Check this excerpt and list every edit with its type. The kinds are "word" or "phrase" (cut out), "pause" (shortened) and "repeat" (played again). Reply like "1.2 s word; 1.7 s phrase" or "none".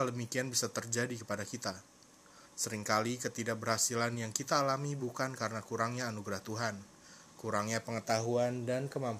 none

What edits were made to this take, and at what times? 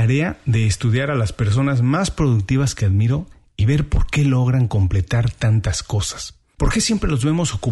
none

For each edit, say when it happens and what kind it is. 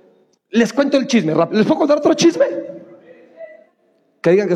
none

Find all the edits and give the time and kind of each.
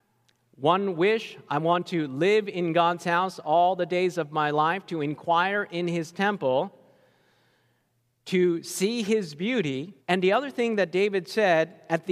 10.0 s pause

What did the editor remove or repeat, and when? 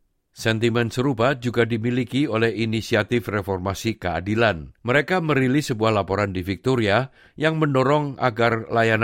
4.8 s pause

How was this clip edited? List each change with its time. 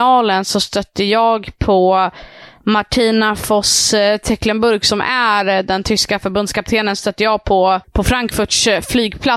7.8 s pause

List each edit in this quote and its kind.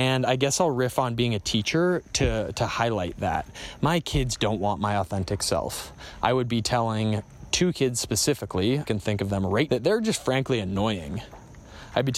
8.9 s word; 9.7 s word

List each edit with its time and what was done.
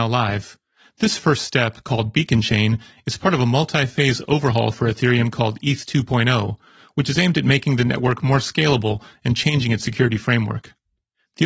none

